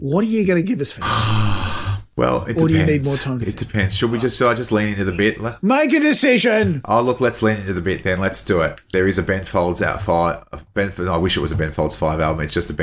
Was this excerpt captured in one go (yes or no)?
yes